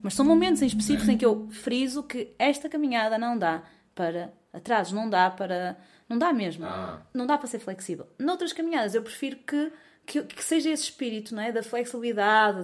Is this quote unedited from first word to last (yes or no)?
yes